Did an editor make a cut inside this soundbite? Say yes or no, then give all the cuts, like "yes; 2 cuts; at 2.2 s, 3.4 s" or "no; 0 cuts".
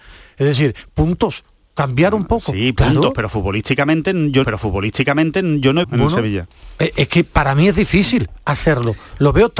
yes; 2 cuts; at 4.4 s, 5.8 s